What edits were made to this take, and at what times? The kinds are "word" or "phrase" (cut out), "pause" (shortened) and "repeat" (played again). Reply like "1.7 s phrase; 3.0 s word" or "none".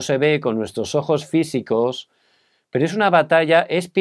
none